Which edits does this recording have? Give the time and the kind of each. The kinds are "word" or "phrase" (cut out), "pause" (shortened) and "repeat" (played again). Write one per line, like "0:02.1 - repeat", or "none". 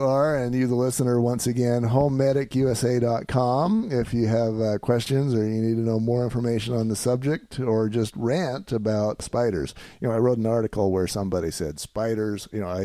none